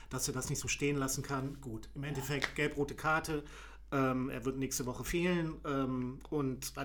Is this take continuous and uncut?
yes; 0 cuts

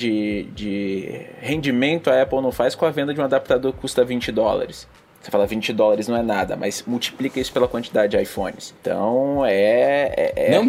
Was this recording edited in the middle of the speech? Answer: no; 0 cuts

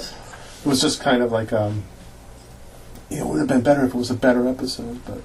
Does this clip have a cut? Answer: no; 0 cuts

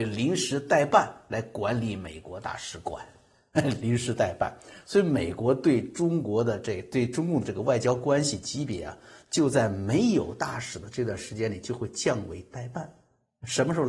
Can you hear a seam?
no; 0 cuts

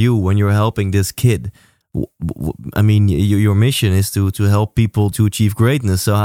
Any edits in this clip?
yes; 1 cut; at 5.1 s

